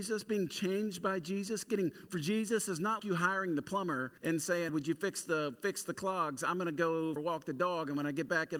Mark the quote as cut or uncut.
cut